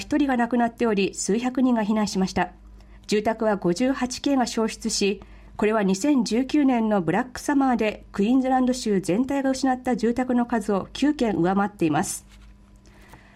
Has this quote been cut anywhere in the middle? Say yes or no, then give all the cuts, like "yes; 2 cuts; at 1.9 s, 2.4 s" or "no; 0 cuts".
yes; 1 cut; at 2.9 s